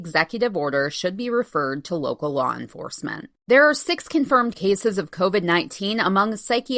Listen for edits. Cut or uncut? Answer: cut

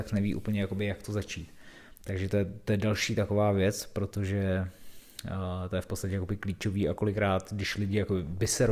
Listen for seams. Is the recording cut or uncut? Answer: uncut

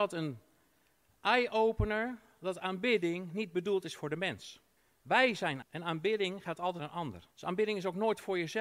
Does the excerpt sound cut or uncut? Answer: cut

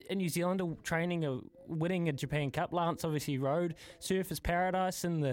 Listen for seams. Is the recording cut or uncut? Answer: uncut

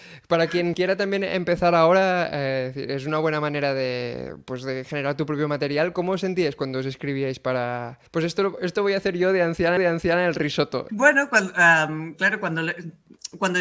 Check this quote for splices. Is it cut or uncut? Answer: cut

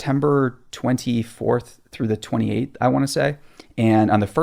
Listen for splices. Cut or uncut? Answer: uncut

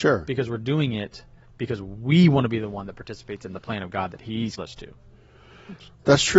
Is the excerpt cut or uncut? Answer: cut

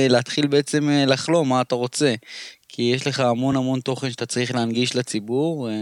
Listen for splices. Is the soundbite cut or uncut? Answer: uncut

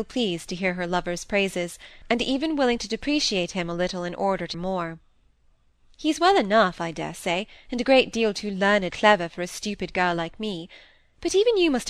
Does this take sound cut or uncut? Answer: cut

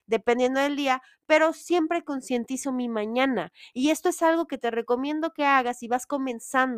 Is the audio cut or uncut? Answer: uncut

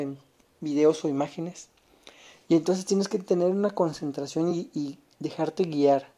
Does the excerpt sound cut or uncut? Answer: uncut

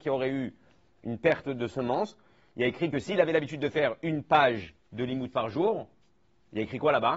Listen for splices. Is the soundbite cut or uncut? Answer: cut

